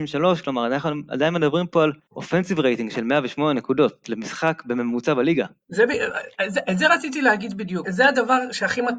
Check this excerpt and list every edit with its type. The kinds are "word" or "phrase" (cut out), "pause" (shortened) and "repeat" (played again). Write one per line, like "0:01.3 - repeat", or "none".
0:02.1 - pause
0:07.8 - word

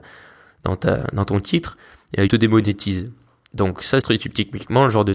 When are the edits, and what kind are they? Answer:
0:02.3 - word
0:04.0 - word

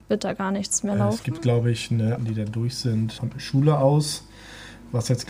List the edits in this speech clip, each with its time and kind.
0:02.2 - phrase
0:03.2 - word

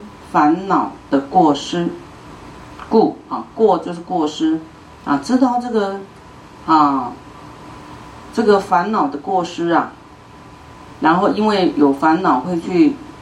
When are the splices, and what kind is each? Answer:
none

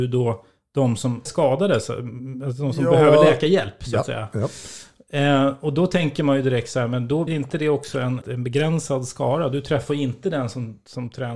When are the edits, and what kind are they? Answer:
0:01.3 - word
0:07.3 - word
0:08.2 - word

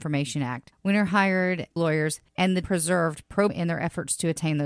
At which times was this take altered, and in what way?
0:01.8 - word
0:02.6 - word
0:03.5 - word

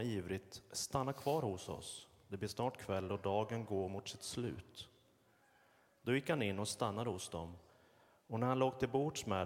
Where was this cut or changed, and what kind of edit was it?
none

